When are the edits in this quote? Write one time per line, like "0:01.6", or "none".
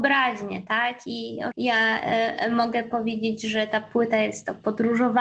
0:01.5